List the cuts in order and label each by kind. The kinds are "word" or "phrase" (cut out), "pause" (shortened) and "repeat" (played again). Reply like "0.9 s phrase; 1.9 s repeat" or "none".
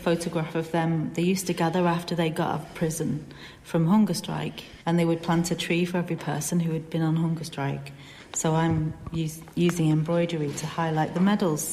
4.8 s pause

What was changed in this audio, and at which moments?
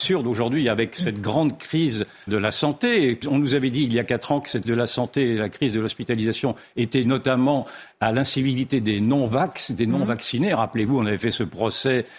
2.3 s word; 3.2 s word; 4.6 s word; 7.0 s word

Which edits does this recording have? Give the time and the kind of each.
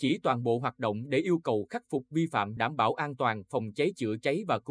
2.6 s word

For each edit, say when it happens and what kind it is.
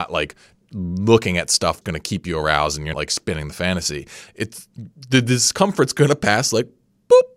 1.8 s word; 2.9 s word; 4.3 s word

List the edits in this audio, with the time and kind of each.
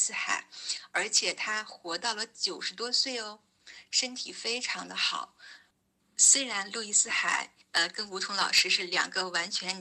5.7 s pause; 7.6 s pause

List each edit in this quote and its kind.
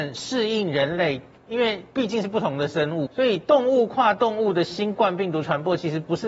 3.1 s word

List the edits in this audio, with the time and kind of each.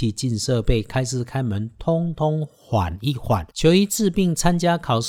3.5 s pause

